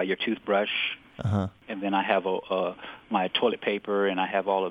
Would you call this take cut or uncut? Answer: uncut